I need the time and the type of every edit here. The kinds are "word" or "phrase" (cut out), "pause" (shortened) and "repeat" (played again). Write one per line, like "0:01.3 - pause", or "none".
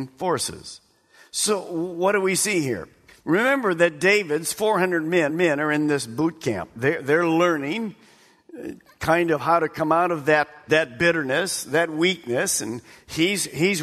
0:05.3 - repeat
0:10.7 - word